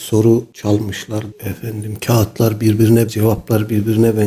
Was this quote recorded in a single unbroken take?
no; 2 cuts; at 1.3 s, 3.1 s

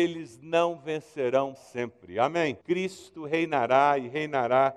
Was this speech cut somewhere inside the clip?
yes; 2 cuts; at 1.5 s, 2.6 s

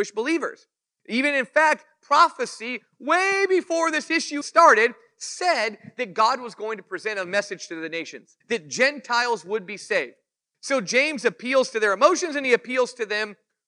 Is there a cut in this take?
yes; 2 cuts; at 4.4 s, 8.4 s

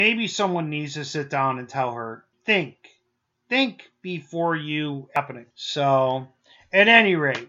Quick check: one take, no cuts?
no; 2 cuts; at 2.3 s, 5.5 s

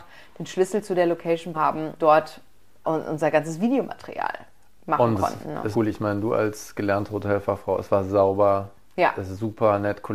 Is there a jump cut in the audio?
yes; 4 cuts; at 1.5 s, 2.0 s, 2.8 s, 5.7 s

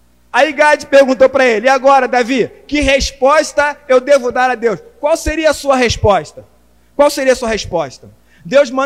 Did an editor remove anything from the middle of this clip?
no; 0 cuts

